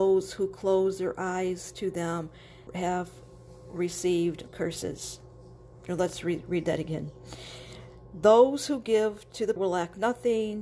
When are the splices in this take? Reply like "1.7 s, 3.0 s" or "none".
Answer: 2.7 s, 4.5 s, 9.6 s